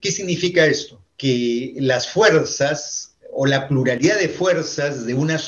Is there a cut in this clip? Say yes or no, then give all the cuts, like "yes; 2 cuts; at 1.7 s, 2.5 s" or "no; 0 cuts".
yes; 1 cut; at 1.1 s